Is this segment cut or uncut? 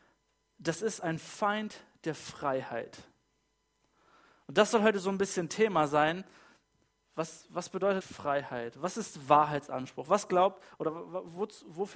cut